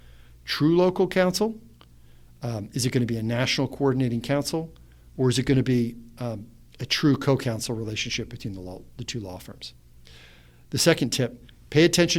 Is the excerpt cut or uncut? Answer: uncut